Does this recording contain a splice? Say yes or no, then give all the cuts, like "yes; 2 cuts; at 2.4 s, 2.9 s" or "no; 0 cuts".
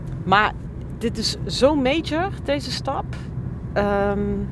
no; 0 cuts